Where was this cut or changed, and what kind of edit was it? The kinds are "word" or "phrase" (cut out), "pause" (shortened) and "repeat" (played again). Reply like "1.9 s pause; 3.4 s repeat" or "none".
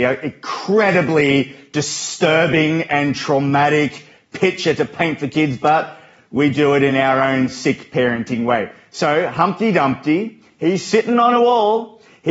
none